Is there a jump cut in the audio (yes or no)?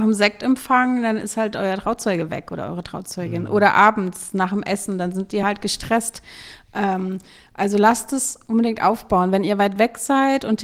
no